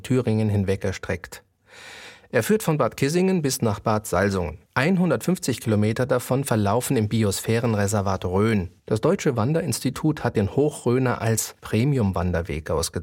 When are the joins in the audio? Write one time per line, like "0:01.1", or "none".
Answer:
0:04.7
0:08.8
0:11.6